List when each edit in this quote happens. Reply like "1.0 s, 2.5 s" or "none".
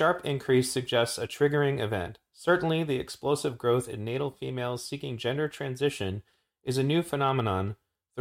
none